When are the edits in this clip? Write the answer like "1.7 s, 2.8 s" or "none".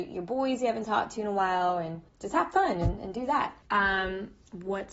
2.1 s, 3.6 s